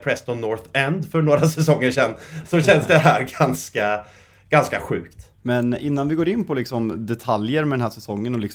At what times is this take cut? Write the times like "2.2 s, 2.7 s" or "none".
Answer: 5.4 s